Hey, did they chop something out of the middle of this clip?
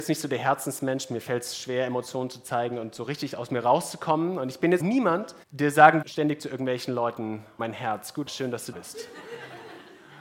yes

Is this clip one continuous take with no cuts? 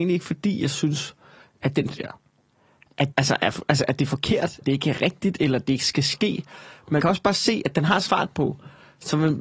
no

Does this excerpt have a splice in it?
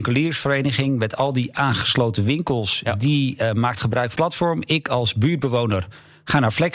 yes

